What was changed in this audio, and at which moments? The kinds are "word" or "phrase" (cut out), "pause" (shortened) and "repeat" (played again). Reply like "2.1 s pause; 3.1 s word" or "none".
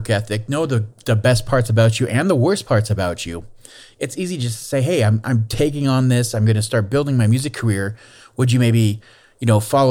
none